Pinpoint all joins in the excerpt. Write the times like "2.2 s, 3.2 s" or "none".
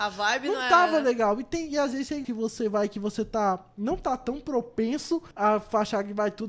2.2 s, 5.3 s